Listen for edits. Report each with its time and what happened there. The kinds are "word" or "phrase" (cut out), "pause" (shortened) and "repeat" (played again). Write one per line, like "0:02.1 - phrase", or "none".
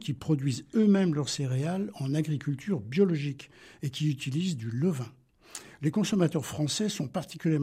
none